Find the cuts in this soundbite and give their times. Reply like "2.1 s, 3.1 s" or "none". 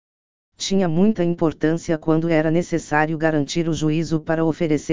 none